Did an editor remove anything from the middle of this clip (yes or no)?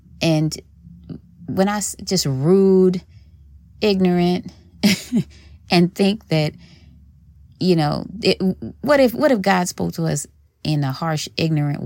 no